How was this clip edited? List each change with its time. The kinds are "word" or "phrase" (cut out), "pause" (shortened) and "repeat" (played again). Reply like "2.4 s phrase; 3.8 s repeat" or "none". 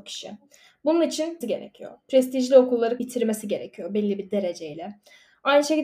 1.4 s word; 3.0 s word